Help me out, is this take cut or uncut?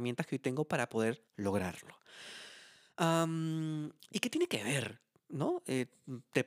cut